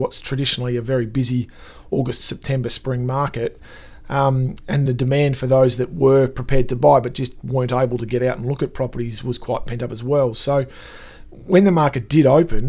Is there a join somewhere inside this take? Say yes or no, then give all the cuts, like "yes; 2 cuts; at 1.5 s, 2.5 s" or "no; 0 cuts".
no; 0 cuts